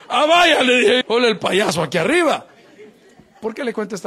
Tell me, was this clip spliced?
yes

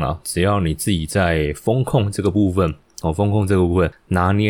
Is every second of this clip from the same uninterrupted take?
yes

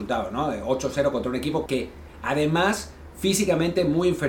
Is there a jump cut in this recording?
yes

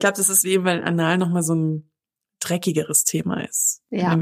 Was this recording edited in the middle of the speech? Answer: no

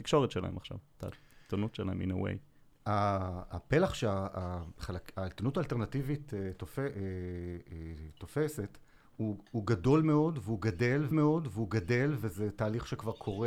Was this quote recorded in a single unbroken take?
no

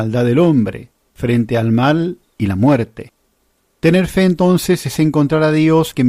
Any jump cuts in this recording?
no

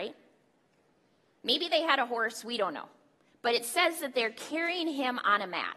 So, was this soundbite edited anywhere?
no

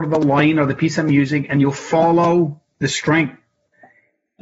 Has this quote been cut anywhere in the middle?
no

